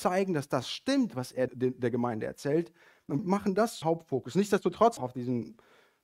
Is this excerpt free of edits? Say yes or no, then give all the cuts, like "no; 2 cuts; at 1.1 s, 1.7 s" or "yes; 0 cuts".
no; 4 cuts; at 1.5 s, 3.2 s, 3.8 s, 5.0 s